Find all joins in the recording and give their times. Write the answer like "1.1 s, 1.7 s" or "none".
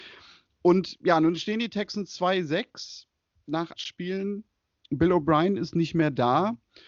3.7 s